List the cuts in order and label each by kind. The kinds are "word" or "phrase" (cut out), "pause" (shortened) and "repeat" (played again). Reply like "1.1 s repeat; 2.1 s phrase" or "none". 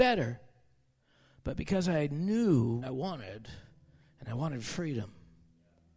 2.8 s word